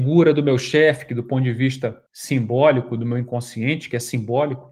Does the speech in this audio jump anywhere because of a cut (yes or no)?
yes